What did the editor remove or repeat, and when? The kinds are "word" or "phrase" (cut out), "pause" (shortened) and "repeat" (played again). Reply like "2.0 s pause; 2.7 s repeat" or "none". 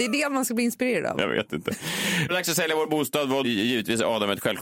2.3 s phrase; 3.4 s word